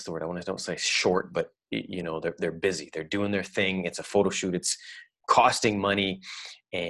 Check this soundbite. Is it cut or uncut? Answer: uncut